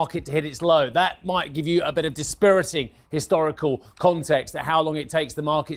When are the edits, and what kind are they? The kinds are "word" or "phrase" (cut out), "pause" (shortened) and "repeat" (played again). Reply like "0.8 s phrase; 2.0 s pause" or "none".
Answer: none